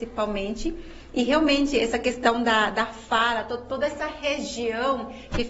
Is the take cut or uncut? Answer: uncut